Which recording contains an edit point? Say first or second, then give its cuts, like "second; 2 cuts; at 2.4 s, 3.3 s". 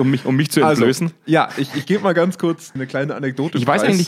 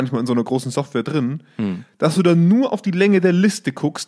first; 1 cut; at 2.8 s